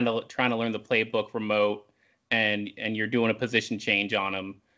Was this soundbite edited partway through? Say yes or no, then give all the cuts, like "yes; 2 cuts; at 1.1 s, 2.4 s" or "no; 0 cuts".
no; 0 cuts